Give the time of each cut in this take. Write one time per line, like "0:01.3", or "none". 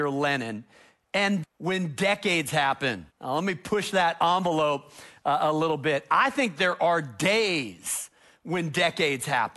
0:01.4
0:03.1